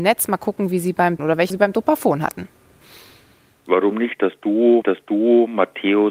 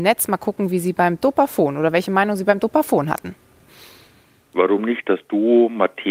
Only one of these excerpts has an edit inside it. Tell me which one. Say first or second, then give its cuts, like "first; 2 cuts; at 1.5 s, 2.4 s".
first; 3 cuts; at 1.2 s, 1.5 s, 4.8 s